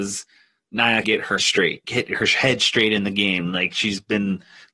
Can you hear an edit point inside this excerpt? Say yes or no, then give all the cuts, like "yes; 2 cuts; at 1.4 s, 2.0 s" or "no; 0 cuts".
yes; 3 cuts; at 1.0 s, 1.4 s, 1.8 s